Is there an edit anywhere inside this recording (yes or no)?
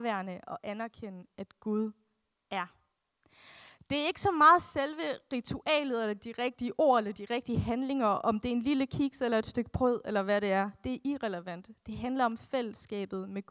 no